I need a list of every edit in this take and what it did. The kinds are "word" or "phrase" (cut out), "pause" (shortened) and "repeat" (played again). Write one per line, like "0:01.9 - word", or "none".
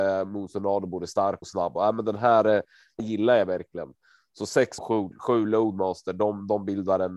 0:01.4 - word
0:01.8 - word
0:03.0 - word
0:04.8 - word